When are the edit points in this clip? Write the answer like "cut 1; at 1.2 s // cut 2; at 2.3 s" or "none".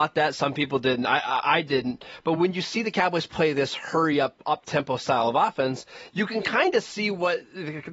none